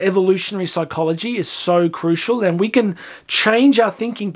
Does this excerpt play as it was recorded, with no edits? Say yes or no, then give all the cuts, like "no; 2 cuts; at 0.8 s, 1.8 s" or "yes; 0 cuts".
yes; 0 cuts